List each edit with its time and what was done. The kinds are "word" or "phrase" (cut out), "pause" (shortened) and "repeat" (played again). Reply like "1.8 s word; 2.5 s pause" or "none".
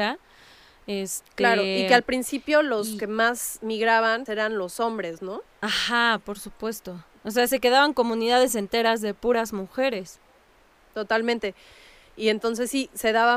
4.3 s word; 5.5 s pause